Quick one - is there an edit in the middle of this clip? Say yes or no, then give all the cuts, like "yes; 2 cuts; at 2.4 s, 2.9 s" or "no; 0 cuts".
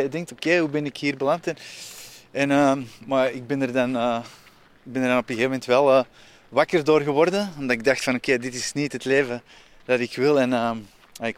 no; 0 cuts